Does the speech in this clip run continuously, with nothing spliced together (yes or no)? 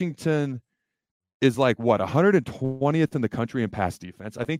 yes